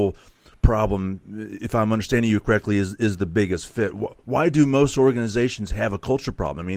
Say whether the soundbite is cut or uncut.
uncut